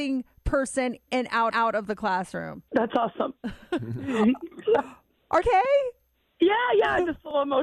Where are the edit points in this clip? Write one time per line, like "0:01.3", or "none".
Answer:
0:01.1
0:01.5
0:02.7
0:05.4